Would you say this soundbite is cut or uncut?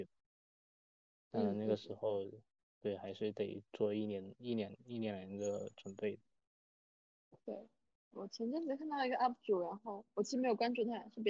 uncut